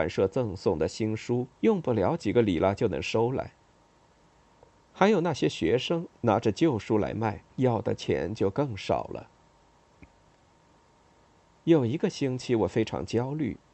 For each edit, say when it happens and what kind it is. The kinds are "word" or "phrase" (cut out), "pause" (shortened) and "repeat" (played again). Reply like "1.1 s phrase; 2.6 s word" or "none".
1.5 s pause; 7.5 s pause